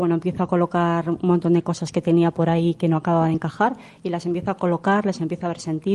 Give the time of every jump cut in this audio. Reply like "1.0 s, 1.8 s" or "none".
none